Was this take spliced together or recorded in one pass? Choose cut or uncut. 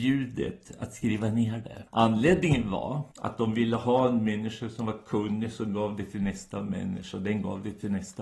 cut